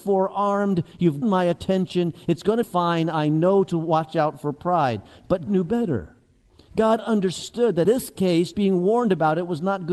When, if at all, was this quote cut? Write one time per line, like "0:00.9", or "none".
0:01.2
0:02.6
0:05.5
0:07.8
0:08.5